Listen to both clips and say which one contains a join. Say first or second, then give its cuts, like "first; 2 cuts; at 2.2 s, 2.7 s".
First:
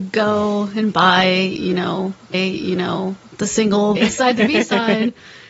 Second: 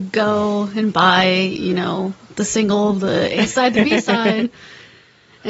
first; 2 cuts; at 2.3 s, 4.0 s